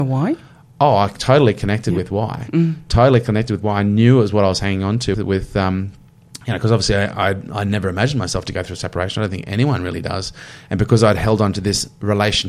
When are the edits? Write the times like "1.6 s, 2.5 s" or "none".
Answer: 5.1 s